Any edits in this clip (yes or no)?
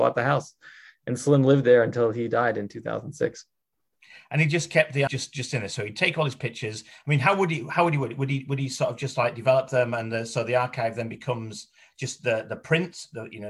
yes